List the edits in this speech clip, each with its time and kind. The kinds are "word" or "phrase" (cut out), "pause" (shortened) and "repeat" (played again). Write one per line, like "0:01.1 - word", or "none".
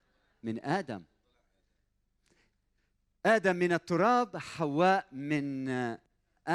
none